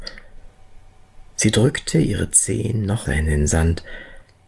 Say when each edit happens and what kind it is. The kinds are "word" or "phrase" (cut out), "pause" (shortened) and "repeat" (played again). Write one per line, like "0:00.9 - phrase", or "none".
0:03.1 - word